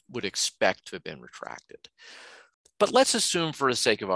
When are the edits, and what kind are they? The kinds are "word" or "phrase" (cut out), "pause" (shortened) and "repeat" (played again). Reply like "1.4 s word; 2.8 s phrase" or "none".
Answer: none